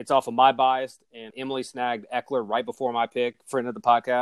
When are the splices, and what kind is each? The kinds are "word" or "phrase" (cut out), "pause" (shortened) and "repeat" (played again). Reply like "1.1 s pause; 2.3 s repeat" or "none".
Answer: 1.3 s word